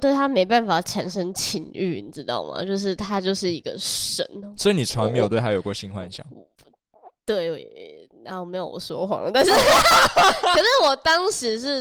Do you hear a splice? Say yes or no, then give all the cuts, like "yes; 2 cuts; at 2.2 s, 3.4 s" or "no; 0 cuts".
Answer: no; 0 cuts